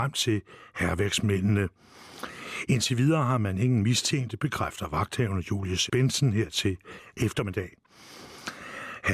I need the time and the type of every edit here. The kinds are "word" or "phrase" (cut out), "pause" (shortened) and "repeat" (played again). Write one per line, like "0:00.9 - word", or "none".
0:05.9 - word